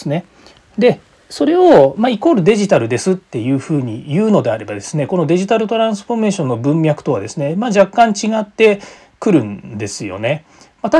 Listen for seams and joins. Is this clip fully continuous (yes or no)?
yes